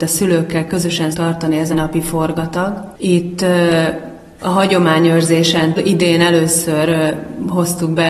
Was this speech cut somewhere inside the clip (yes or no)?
yes